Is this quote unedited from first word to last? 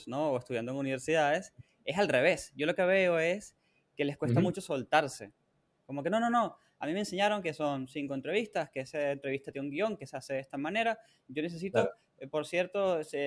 yes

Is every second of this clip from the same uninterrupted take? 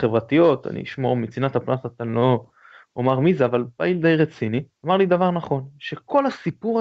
no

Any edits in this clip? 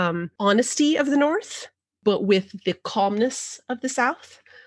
no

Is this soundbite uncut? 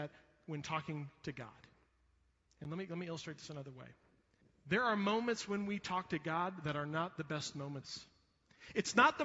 no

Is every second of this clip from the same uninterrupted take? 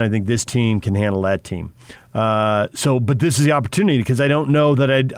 yes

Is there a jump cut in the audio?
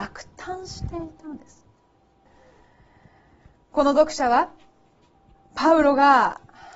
no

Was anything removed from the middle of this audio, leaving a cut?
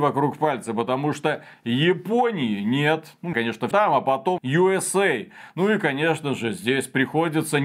yes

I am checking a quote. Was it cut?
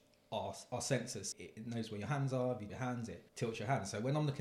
yes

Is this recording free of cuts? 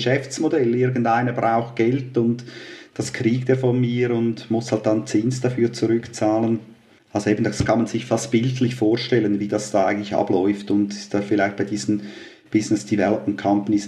yes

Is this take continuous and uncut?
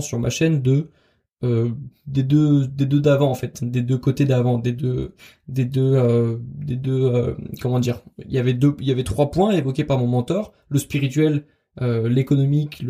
yes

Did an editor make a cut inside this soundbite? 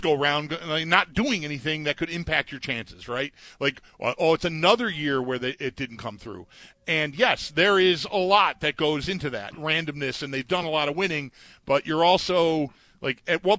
no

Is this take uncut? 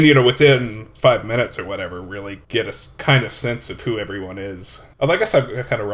no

